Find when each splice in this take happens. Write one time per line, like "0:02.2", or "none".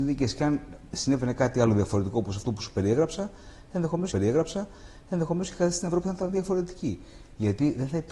0:04.1